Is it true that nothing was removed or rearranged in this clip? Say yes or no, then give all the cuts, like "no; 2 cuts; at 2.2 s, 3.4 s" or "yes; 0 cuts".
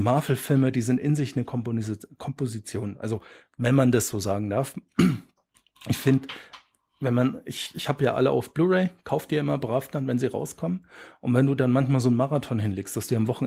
yes; 0 cuts